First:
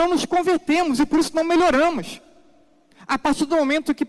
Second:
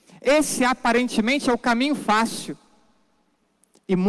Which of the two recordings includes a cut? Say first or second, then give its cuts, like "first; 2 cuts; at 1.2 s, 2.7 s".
first; 1 cut; at 2.9 s